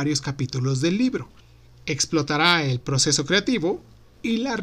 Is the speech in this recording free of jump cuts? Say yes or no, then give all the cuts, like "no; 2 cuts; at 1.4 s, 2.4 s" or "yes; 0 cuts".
no; 1 cut; at 1.4 s